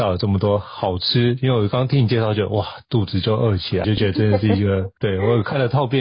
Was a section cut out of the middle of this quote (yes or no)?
yes